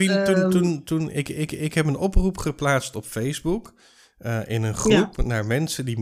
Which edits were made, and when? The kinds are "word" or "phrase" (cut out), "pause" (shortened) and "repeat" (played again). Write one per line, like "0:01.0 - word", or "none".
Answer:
0:01.5 - repeat